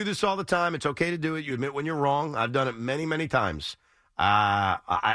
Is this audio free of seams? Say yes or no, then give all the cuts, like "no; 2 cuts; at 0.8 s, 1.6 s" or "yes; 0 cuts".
yes; 0 cuts